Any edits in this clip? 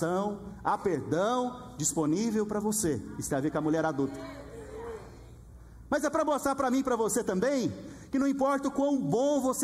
no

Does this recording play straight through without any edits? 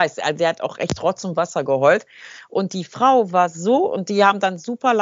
yes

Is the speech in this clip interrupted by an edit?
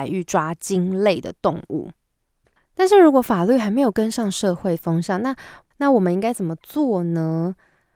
no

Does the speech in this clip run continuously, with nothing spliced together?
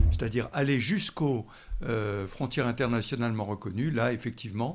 yes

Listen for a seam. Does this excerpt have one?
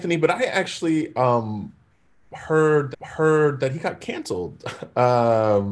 yes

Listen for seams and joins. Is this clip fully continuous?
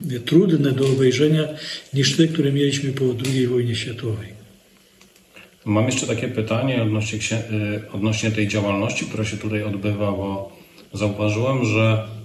yes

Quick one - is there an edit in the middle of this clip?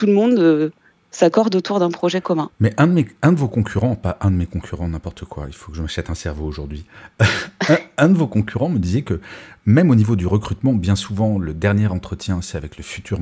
no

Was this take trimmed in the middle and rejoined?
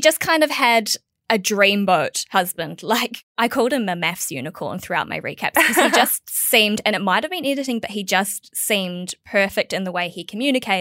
no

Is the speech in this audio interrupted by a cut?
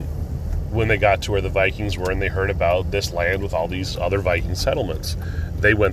no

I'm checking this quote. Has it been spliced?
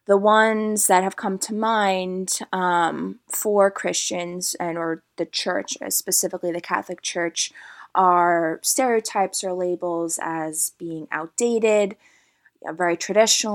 no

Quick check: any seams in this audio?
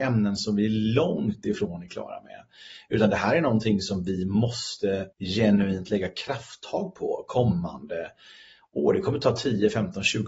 yes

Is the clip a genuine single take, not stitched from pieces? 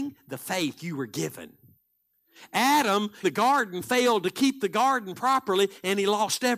no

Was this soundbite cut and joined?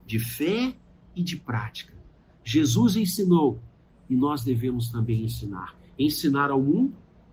no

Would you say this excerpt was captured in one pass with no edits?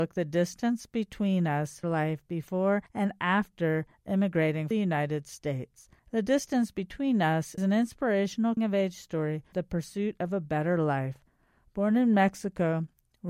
no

